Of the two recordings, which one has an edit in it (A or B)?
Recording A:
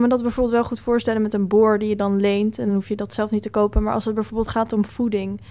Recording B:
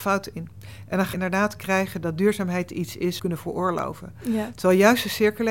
B